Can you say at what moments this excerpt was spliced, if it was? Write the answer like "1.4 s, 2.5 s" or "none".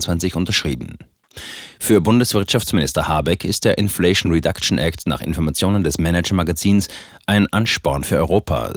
none